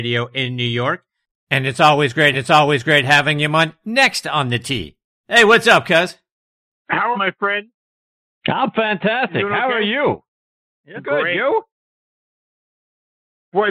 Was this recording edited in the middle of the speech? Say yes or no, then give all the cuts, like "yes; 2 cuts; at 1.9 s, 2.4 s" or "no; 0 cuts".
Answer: yes; 3 cuts; at 2.3 s, 7.1 s, 11.0 s